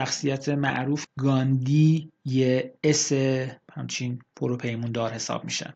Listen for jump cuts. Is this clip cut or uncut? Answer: cut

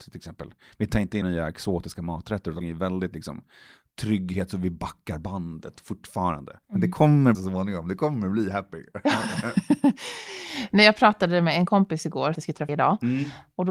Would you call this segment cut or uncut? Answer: cut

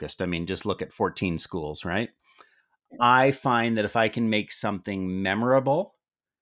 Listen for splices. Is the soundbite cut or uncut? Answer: uncut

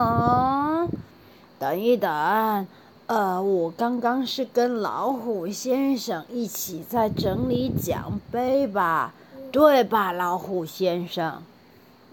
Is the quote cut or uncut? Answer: uncut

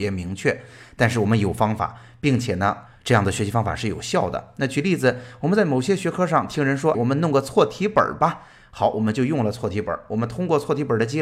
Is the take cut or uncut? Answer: cut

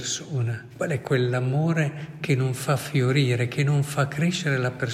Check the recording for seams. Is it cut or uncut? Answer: uncut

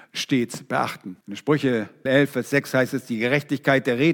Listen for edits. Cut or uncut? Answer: cut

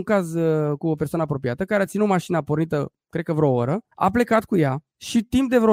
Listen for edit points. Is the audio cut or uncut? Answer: uncut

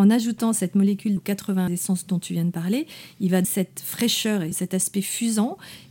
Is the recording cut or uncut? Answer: cut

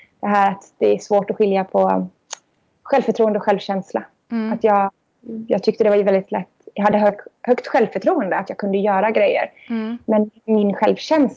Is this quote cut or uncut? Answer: uncut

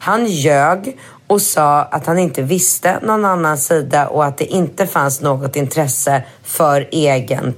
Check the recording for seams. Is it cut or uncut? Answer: uncut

